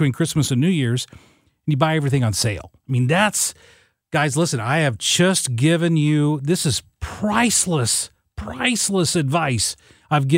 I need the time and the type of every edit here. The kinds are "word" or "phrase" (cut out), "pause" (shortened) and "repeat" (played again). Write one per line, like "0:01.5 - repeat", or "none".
none